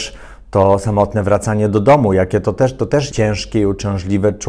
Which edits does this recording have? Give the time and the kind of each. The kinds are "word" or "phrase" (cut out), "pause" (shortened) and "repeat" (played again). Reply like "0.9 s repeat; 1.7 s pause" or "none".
3.1 s word